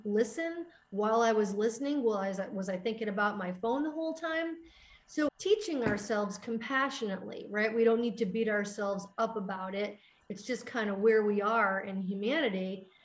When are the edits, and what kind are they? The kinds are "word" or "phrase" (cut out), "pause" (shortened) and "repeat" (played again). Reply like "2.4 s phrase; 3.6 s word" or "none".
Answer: 5.3 s word